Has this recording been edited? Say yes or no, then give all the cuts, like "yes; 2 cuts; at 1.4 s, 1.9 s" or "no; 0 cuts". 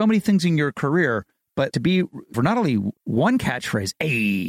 yes; 3 cuts; at 1.7 s, 2.3 s, 3.0 s